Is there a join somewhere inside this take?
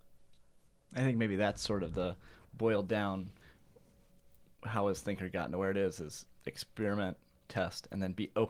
no; 0 cuts

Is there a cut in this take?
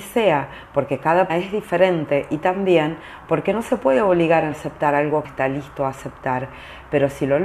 yes; 3 cuts; at 1.3 s, 4.5 s, 5.2 s

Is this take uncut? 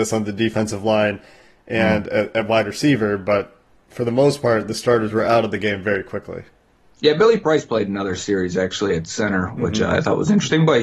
yes; 0 cuts

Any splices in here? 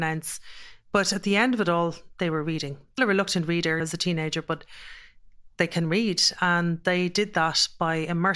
yes; 2 cuts; at 3.0 s, 3.8 s

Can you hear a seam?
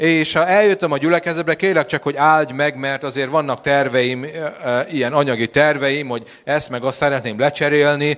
no; 0 cuts

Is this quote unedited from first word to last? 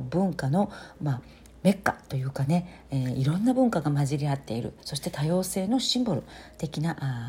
yes; 0 cuts

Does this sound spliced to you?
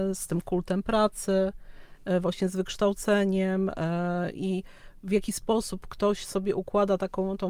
no; 0 cuts

